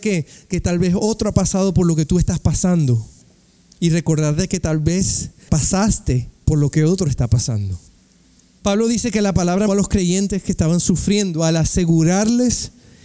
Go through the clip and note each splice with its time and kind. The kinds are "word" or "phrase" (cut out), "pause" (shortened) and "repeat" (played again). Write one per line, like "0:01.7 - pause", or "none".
0:05.5 - phrase
0:09.7 - word